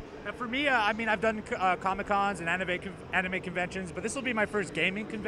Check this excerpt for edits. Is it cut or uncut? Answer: uncut